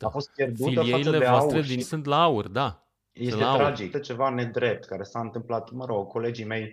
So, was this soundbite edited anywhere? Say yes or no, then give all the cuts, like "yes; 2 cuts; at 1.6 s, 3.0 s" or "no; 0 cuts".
yes; 3 cuts; at 1.8 s, 2.9 s, 3.9 s